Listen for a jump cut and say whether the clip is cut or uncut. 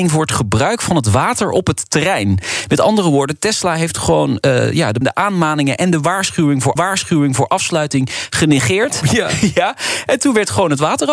cut